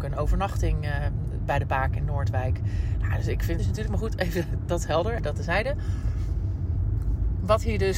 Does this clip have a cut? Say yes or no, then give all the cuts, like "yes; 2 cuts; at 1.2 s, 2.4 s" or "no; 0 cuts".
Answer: yes; 2 cuts; at 3.6 s, 5.2 s